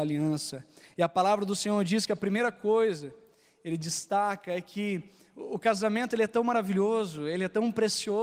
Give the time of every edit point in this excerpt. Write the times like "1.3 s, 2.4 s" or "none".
none